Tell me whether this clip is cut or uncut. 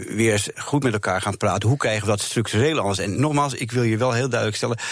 uncut